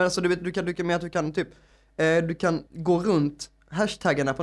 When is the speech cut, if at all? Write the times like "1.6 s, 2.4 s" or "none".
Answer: 2.7 s